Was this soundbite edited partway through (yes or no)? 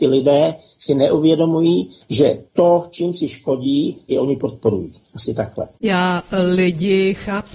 yes